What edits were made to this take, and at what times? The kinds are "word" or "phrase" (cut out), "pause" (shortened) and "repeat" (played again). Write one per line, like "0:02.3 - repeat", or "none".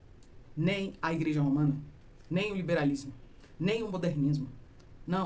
none